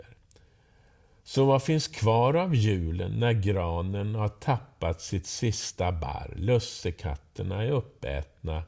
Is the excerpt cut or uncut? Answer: uncut